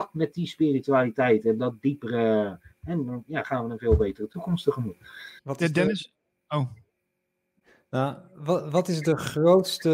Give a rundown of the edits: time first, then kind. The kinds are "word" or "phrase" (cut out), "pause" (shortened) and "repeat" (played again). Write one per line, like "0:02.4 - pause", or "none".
0:05.4 - pause